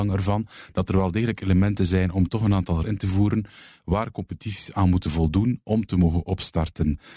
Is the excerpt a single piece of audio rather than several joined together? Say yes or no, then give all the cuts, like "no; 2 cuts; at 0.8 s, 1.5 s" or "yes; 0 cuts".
no; 1 cut; at 2.8 s